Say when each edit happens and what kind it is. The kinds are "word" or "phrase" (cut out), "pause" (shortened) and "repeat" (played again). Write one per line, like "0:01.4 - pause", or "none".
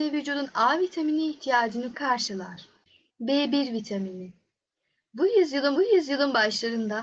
0:01.9 - word
0:05.8 - repeat